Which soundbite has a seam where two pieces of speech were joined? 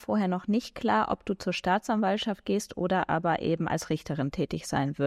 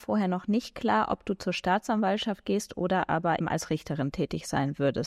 second; 1 cut; at 3.4 s

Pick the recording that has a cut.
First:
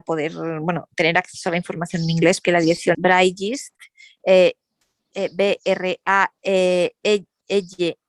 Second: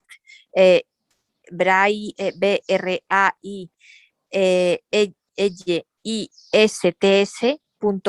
first; 4 cuts; at 2.4 s, 2.9 s, 5.1 s, 6.3 s

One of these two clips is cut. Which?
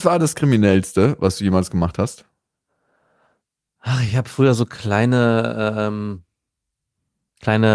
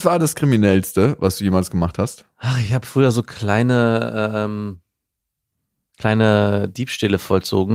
second; 1 cut; at 2.3 s

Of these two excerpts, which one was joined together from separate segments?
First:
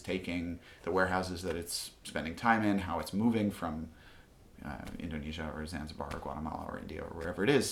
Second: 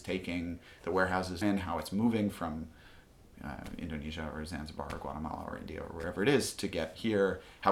second; 1 cut; at 1.4 s

